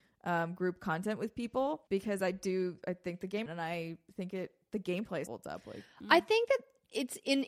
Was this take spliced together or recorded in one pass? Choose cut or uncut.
cut